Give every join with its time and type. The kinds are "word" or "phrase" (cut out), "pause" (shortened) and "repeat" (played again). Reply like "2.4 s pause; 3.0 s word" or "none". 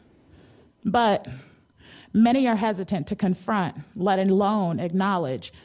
none